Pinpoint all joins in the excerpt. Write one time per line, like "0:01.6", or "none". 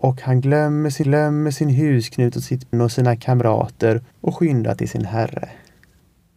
0:01.0
0:02.7
0:04.1